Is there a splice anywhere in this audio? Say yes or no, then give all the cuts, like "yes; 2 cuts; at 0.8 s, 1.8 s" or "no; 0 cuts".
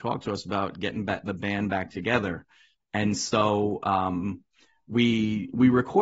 no; 0 cuts